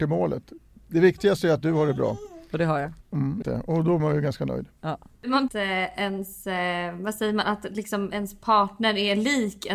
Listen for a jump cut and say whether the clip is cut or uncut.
cut